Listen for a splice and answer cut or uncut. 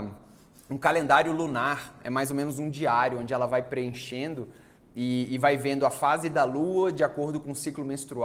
uncut